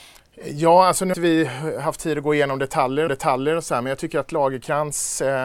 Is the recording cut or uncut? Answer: cut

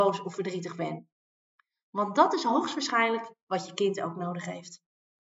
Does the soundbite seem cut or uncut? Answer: uncut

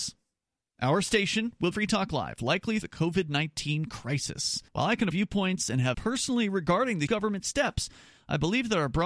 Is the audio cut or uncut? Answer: cut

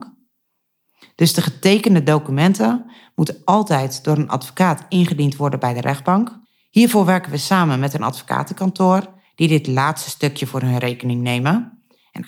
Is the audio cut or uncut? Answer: cut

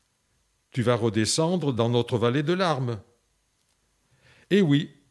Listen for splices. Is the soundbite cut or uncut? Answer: uncut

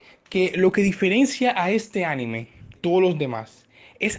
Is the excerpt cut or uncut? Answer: cut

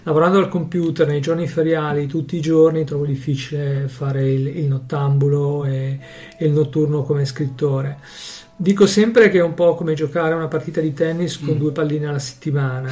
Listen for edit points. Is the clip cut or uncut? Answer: uncut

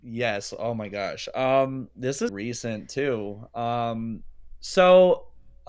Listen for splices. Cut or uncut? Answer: cut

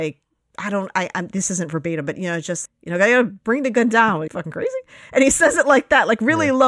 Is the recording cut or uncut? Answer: cut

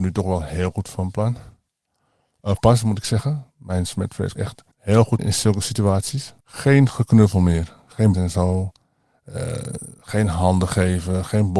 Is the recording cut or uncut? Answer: cut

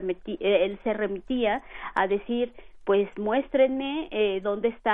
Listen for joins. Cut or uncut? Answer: uncut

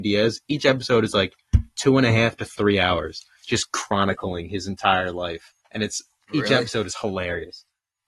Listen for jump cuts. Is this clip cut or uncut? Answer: cut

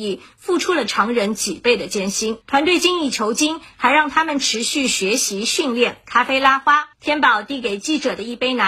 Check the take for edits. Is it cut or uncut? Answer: cut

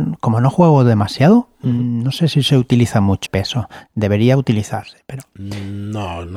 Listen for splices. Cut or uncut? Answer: cut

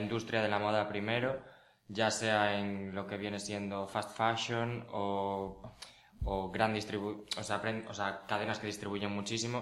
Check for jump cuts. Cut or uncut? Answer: uncut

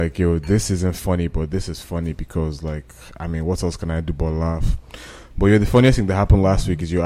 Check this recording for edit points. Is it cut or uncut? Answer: uncut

